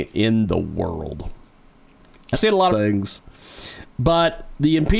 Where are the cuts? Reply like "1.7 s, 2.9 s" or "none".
2.3 s, 2.7 s